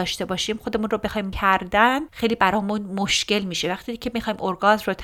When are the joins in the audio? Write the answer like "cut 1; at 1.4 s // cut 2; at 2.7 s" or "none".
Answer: cut 1; at 1.3 s